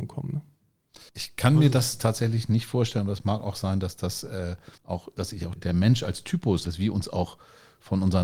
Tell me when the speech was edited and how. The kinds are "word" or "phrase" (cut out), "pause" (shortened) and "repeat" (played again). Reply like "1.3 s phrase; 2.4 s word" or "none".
1.1 s pause; 4.8 s pause; 5.6 s word; 6.6 s word